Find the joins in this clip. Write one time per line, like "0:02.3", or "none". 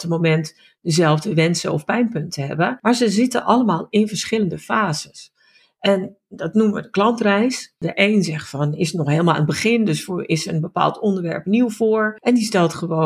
none